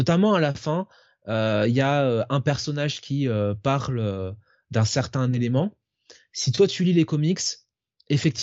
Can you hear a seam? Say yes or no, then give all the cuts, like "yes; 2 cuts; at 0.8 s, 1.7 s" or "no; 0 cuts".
no; 0 cuts